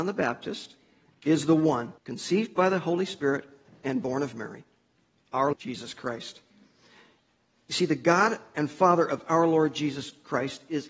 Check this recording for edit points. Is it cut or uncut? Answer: cut